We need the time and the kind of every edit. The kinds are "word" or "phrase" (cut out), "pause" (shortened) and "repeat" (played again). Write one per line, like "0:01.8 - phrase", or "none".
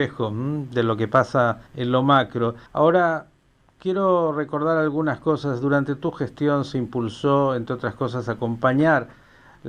0:01.7 - pause
0:02.7 - pause